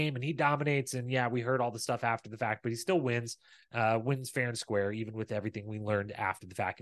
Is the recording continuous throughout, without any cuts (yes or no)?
yes